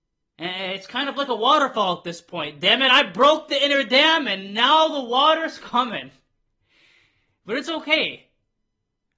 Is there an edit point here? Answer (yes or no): no